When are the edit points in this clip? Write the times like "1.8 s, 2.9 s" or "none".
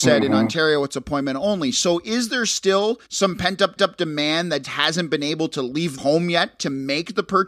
3.0 s, 3.8 s, 4.6 s, 6.0 s